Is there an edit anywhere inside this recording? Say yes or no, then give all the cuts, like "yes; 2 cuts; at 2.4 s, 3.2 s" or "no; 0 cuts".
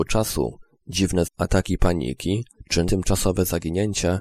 yes; 2 cuts; at 1.2 s, 2.9 s